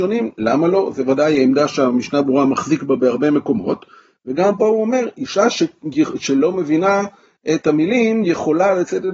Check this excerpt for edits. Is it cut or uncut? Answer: uncut